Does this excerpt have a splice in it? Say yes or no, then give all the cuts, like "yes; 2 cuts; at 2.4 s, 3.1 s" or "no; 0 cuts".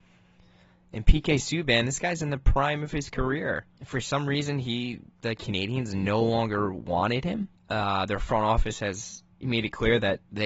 no; 0 cuts